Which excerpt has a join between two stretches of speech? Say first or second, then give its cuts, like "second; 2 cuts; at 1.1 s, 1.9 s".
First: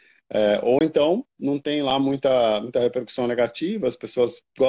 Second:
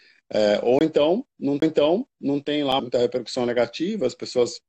second; 2 cuts; at 1.6 s, 2.8 s